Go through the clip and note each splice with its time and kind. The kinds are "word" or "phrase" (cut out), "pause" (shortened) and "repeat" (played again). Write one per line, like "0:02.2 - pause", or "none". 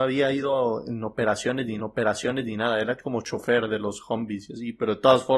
0:01.8 - repeat